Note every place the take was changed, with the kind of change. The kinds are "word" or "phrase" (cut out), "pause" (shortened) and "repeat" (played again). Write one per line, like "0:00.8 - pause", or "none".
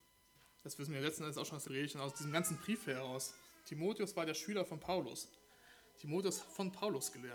0:01.7 - word
0:06.4 - word